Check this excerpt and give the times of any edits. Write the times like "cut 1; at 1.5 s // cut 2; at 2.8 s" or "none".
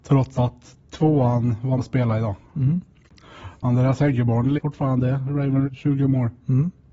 cut 1; at 1.8 s // cut 2; at 4.5 s // cut 3; at 5.6 s